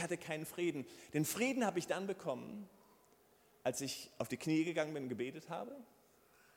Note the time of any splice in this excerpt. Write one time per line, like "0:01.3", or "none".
none